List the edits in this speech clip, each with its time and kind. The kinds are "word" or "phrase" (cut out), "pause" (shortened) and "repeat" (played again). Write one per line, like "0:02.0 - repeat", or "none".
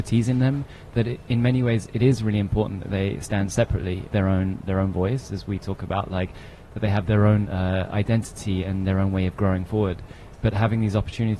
0:04.1 - phrase

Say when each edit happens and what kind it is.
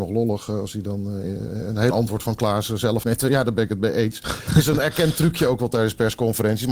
0:01.9 - word
0:03.0 - word

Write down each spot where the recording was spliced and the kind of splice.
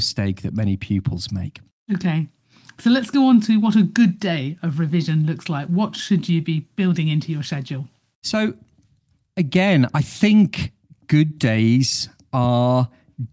none

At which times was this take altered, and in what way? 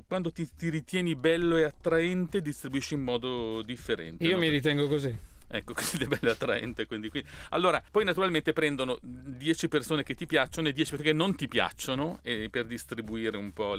0:07.9 - pause

